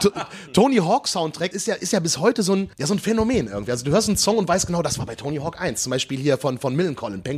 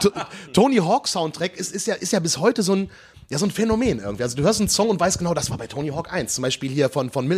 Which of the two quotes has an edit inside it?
first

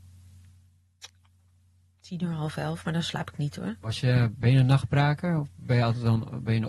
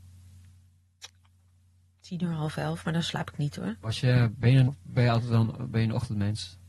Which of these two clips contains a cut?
second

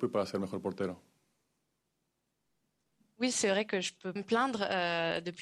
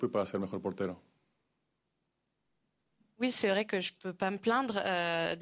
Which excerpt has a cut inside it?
first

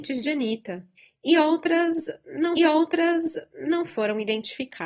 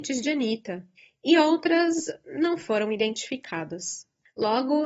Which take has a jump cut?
first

